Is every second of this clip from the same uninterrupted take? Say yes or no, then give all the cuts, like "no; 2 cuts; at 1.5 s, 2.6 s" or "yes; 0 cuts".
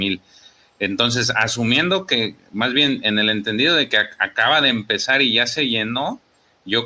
yes; 0 cuts